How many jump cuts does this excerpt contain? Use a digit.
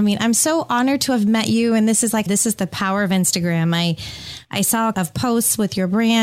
2